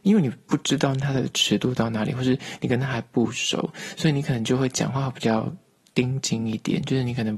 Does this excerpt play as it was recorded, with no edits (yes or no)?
yes